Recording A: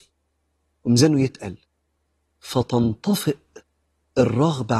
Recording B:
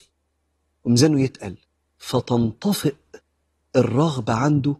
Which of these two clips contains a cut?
B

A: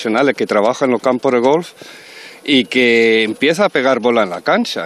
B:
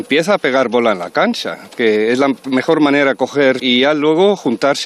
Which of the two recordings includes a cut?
B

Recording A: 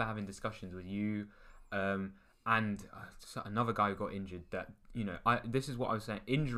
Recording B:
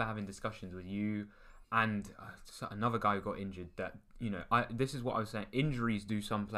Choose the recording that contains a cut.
B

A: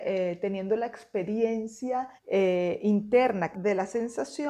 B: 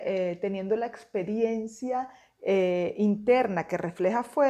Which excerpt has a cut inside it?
A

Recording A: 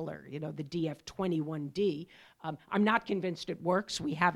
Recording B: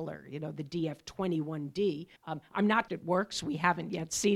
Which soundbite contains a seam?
B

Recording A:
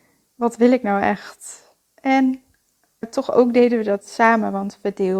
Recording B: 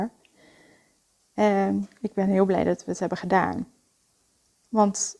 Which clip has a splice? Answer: A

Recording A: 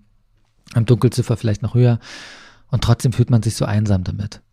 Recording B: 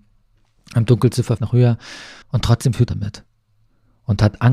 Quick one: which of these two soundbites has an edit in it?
B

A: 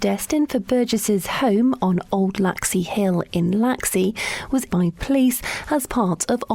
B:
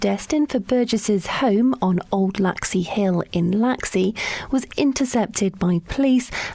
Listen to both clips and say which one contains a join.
A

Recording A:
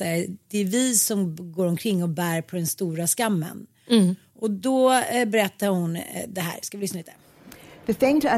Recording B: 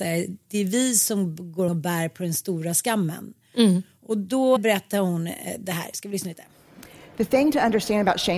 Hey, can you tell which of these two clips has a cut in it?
B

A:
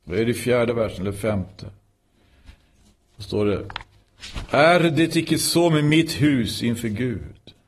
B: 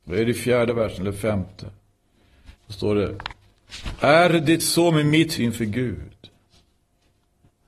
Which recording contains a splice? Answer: B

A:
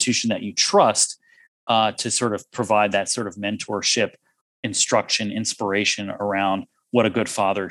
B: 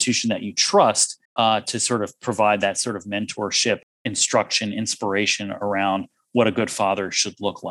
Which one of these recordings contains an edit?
B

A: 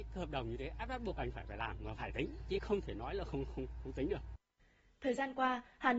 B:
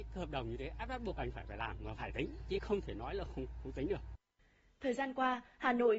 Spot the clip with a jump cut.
B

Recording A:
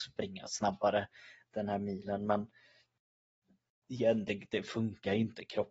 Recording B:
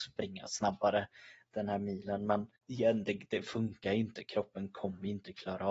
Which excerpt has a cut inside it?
B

